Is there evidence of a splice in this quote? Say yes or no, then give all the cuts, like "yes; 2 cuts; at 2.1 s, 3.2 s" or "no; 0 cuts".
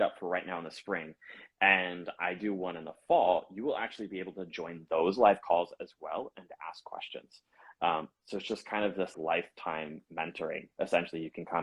yes; 1 cut; at 9.1 s